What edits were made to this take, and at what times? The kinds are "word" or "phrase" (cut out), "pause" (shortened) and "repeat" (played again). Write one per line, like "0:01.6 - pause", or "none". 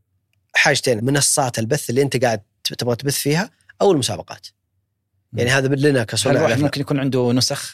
0:01.0 - phrase